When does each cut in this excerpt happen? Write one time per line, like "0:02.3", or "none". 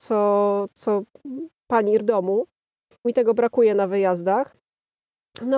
0:02.0
0:03.0